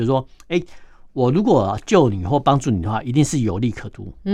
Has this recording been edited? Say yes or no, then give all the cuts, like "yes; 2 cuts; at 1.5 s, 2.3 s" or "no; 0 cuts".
no; 0 cuts